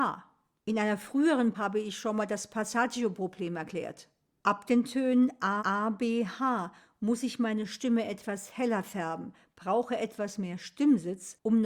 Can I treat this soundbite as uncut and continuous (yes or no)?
no